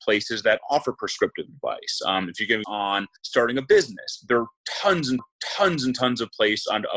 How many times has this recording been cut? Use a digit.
3